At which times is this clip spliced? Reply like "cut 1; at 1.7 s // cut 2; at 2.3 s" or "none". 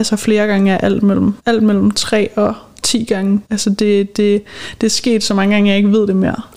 cut 1; at 1.4 s // cut 2; at 3.5 s